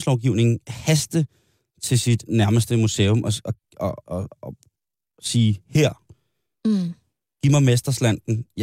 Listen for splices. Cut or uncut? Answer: cut